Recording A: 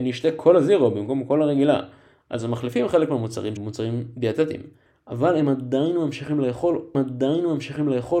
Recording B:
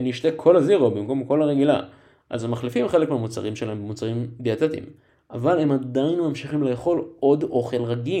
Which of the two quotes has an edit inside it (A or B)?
A